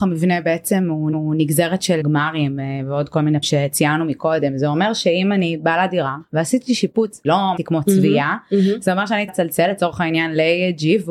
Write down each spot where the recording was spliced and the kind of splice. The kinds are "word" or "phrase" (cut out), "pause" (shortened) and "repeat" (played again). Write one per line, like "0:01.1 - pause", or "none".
0:01.1 - repeat
0:02.0 - word
0:03.4 - word
0:07.2 - phrase
0:07.6 - phrase
0:09.3 - word